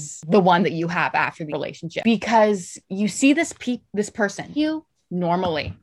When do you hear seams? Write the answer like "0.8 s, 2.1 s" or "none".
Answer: 1.5 s, 2.8 s, 4.6 s